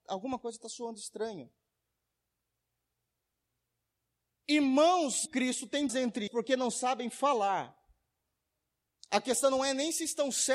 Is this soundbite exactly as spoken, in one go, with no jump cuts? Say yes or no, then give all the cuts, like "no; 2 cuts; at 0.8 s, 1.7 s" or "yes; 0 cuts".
no; 3 cuts; at 5.3 s, 5.9 s, 6.3 s